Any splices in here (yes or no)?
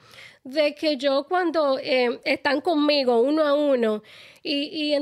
no